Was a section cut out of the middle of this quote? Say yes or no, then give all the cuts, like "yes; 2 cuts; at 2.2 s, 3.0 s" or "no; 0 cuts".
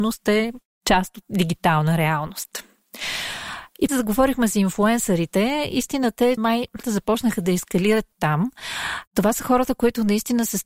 yes; 5 cuts; at 1.2 s, 3.9 s, 6.4 s, 6.8 s, 8.1 s